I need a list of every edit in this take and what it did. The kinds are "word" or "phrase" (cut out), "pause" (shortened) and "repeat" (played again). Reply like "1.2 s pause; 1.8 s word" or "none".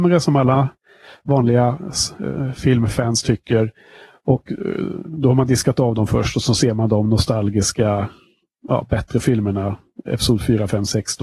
none